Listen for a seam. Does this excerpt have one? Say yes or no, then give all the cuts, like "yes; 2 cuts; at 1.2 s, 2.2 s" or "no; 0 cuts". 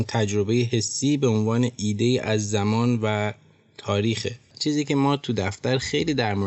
no; 0 cuts